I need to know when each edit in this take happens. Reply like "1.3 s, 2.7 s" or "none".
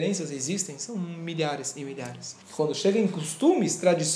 2.4 s